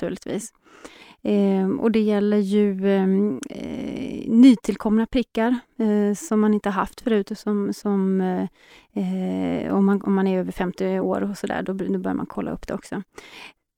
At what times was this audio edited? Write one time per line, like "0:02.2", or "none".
none